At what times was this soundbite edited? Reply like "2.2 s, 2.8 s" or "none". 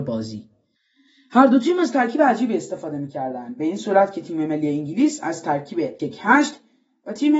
6.0 s